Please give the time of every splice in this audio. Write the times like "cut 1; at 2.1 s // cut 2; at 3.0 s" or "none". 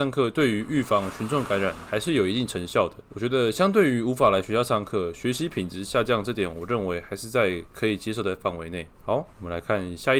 cut 1; at 8.9 s